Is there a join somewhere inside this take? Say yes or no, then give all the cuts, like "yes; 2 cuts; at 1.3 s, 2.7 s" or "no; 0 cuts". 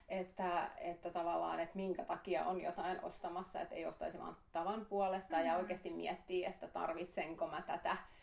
no; 0 cuts